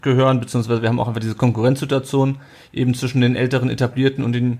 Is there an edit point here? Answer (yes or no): no